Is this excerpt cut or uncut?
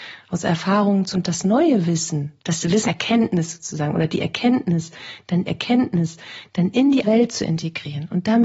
cut